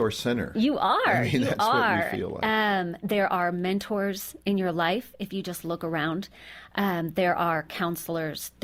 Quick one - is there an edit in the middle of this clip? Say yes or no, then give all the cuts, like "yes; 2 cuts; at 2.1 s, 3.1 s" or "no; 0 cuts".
no; 0 cuts